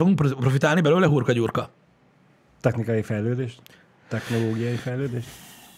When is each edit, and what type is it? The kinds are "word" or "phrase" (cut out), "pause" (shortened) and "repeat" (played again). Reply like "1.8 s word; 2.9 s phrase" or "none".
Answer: none

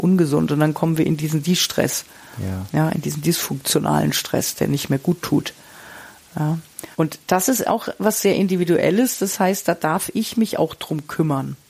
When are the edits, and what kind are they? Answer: 6.9 s pause

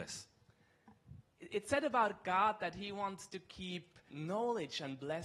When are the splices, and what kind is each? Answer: 4.1 s word

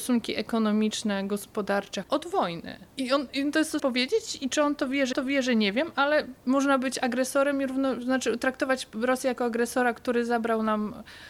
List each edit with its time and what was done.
2.0 s word; 3.8 s word; 5.1 s repeat

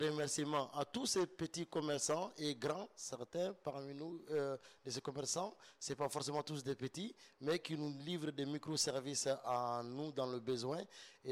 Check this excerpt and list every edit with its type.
none

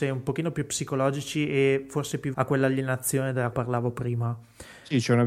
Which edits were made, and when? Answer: 2.3 s word; 3.5 s word

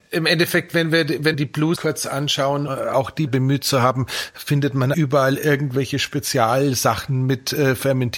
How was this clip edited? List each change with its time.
1.3 s word; 1.8 s word; 2.7 s word; 3.3 s phrase; 4.9 s word

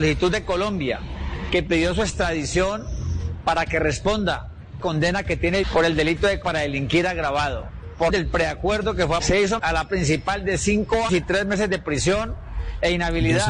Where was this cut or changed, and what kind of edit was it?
4.8 s word; 5.6 s word; 6.4 s word; 8.1 s word; 9.2 s word; 9.6 s word; 9.9 s word; 11.1 s word

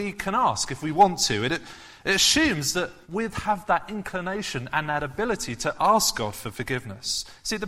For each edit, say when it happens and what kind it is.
3.0 s pause

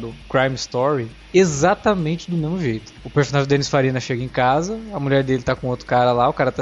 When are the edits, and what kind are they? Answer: none

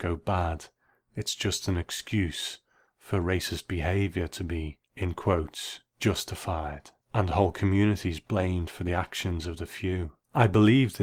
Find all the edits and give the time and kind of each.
none

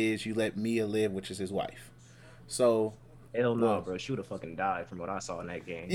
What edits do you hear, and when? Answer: none

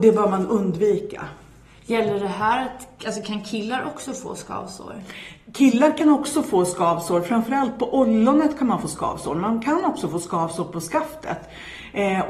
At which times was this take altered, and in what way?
none

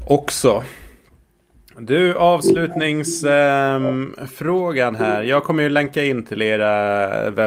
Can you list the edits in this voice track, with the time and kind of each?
none

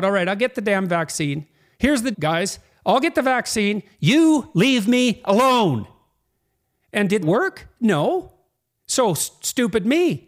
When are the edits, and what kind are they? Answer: 2.1 s word; 4.5 s word; 7.2 s word

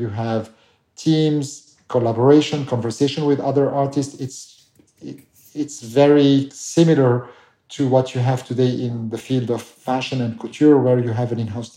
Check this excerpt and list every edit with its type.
none

